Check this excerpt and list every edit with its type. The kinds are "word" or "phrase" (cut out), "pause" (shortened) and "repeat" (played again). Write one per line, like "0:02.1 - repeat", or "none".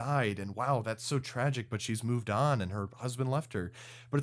none

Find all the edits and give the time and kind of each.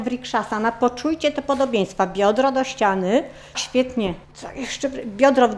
0:03.5 - word
0:04.2 - pause

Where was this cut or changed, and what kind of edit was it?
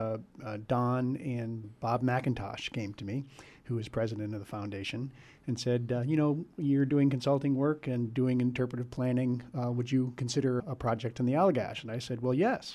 0:01.6 - word
0:10.6 - word

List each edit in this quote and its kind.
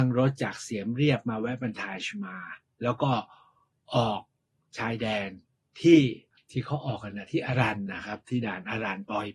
none

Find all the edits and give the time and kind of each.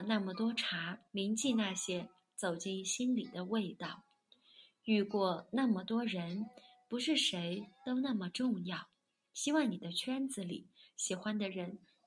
0:01.1 - pause

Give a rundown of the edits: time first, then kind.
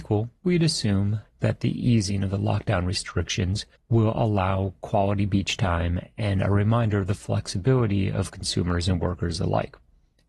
0:03.8 - pause

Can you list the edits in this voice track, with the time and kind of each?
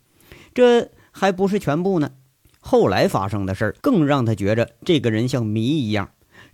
0:02.4 - pause
0:03.8 - pause

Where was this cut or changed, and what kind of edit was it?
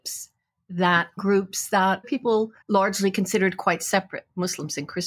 0:01.2 - phrase
0:02.0 - word
0:02.6 - pause

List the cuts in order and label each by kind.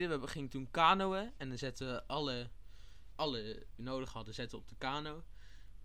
0:03.1 - word
0:03.8 - phrase

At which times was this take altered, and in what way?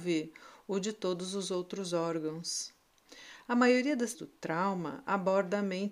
0:04.1 - word

